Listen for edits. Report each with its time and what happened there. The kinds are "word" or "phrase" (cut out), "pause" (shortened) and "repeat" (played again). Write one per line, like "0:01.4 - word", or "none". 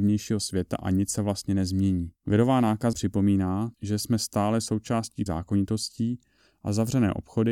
0:02.2 - pause
0:02.9 - word
0:03.7 - pause
0:05.3 - word